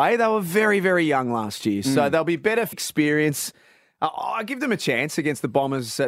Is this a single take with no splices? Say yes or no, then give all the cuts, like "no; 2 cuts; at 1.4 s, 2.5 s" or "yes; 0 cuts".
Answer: no; 1 cut; at 2.7 s